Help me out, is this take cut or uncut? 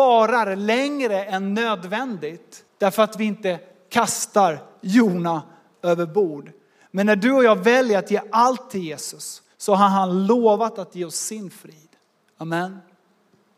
cut